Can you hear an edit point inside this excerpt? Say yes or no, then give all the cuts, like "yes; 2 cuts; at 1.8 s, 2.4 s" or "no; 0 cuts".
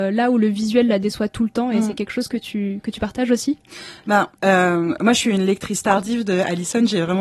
yes; 1 cut; at 4.4 s